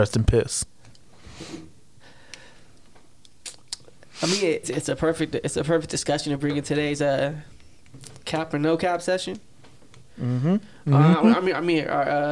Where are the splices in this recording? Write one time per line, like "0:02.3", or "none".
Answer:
0:04.6